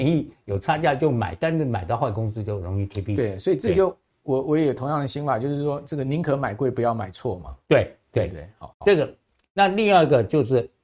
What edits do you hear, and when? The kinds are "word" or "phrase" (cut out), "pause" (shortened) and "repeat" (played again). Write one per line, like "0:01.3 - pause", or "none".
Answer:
0:08.7 - word